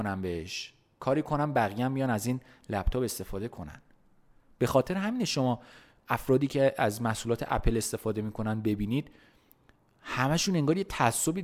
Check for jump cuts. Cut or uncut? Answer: uncut